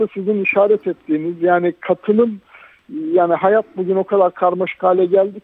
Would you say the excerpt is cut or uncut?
uncut